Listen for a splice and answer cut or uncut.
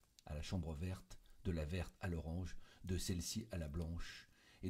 uncut